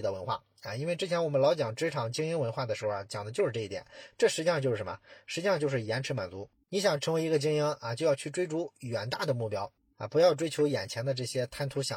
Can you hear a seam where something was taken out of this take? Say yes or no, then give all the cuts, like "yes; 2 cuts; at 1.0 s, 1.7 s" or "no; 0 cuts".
no; 0 cuts